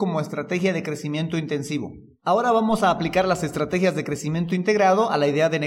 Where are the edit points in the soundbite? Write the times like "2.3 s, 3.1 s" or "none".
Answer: none